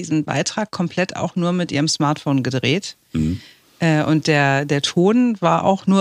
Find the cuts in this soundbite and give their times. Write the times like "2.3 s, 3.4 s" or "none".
none